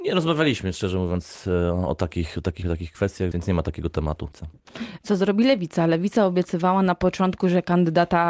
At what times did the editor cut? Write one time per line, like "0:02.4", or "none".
0:02.6
0:03.3
0:04.3